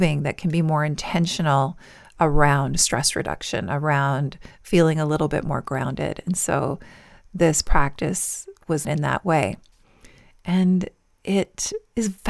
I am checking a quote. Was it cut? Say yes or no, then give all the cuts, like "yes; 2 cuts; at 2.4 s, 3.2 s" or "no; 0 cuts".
yes; 1 cut; at 8.8 s